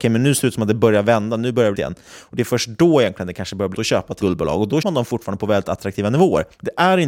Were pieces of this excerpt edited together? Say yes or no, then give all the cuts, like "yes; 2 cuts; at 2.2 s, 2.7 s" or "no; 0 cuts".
yes; 4 cuts; at 1.7 s, 3.7 s, 4.2 s, 4.8 s